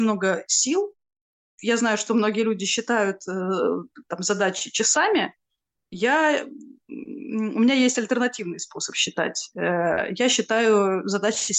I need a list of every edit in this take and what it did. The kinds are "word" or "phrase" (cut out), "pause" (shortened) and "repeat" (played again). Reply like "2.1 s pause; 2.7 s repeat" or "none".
none